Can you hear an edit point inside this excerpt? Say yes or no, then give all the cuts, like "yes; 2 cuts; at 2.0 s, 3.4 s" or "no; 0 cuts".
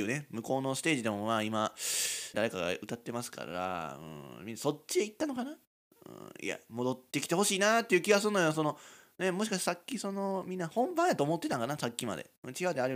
yes; 1 cut; at 2.3 s